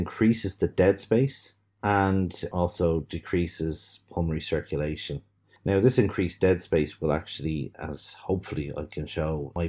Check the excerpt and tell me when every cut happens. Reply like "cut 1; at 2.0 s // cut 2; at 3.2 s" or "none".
none

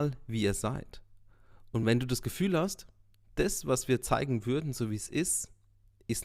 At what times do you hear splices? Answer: none

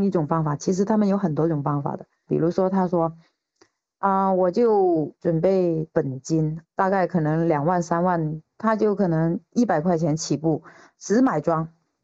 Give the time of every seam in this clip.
none

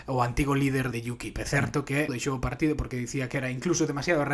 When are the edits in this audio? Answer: cut 1; at 0.9 s // cut 2; at 2.1 s

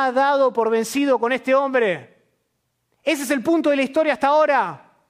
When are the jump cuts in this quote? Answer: cut 1; at 2.7 s

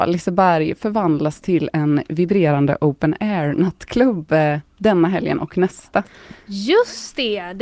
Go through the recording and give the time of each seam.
none

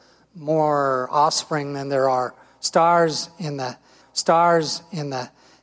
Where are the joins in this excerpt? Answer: cut 1; at 4.0 s

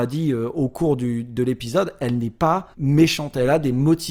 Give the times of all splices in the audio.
cut 1; at 2.7 s

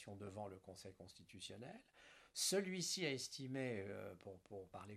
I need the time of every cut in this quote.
none

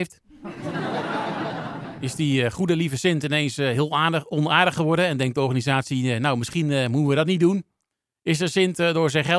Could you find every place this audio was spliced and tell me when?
cut 1; at 7.9 s

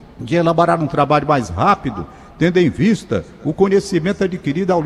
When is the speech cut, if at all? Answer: none

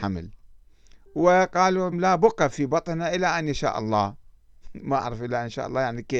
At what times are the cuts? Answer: cut 1; at 1.9 s

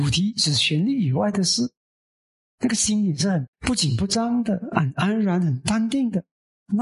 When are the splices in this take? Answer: cut 1; at 3.5 s

